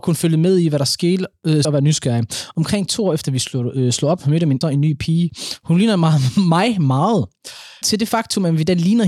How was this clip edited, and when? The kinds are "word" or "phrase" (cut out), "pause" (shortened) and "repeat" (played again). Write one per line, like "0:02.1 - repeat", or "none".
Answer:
0:01.6 - word
0:04.6 - word
0:07.8 - word